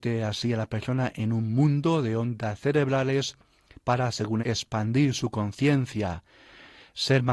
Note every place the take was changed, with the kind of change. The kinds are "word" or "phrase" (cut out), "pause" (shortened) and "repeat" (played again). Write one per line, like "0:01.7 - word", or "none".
0:04.4 - word

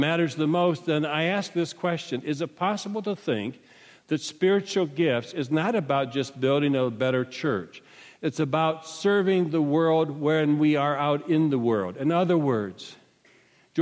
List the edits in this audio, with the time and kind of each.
none

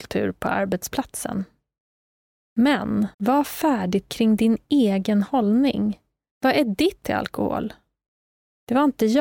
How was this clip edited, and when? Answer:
0:03.1 - pause
0:04.1 - word
0:07.0 - word

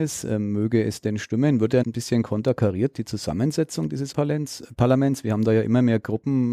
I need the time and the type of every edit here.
0:01.8 - word
0:02.9 - word
0:04.1 - word

